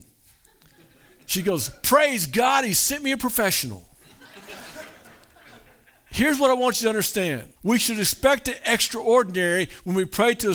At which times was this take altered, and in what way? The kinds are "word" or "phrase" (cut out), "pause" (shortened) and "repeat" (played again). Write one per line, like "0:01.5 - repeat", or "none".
0:07.6 - pause